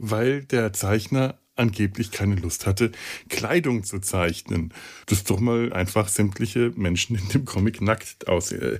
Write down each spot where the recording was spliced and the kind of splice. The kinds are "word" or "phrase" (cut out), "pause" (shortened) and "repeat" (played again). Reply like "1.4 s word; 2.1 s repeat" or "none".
5.0 s pause; 5.7 s phrase